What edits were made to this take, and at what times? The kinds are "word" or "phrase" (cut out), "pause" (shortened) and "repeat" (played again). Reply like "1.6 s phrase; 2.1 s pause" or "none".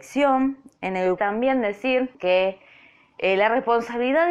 1.2 s phrase; 2.1 s pause